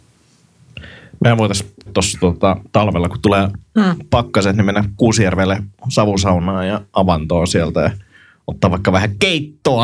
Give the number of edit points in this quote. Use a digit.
1